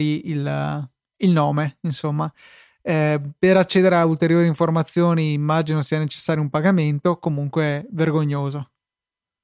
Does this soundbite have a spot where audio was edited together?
no; 0 cuts

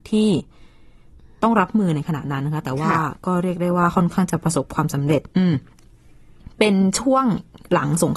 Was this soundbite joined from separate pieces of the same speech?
yes; 1 cut; at 5.3 s

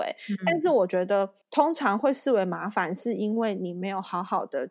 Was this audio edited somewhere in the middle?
yes; 1 cut; at 1.4 s

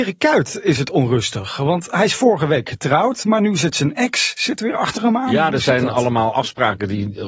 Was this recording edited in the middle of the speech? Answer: no; 0 cuts

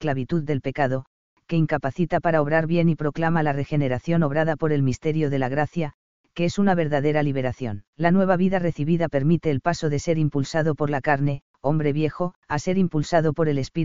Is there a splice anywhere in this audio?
yes; 3 cuts; at 7.9 s, 11.5 s, 12.4 s

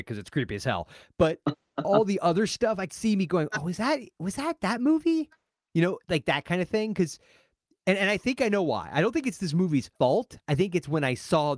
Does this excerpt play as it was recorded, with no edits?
no; 2 cuts; at 2.9 s, 10.0 s

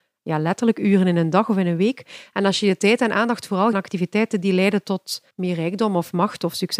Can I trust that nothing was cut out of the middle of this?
no; 2 cuts; at 3.7 s, 5.3 s

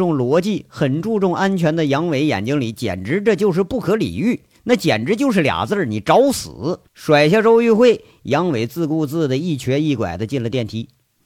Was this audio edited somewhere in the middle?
yes; 1 cut; at 6.9 s

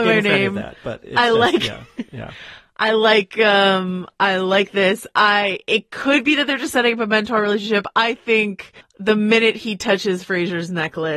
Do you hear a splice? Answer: yes; 1 cut; at 8.8 s

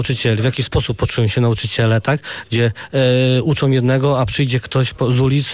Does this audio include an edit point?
no; 0 cuts

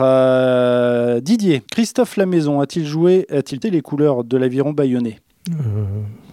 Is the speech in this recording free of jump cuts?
no; 2 cuts; at 1.7 s, 3.6 s

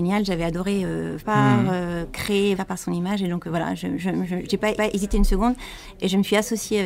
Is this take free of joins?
no; 3 cuts; at 1.2 s, 2.6 s, 4.8 s

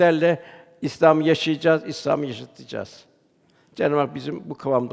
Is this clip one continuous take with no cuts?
yes; 0 cuts

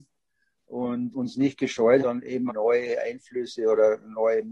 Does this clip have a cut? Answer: yes; 3 cuts; at 1.1 s, 2.0 s, 2.5 s

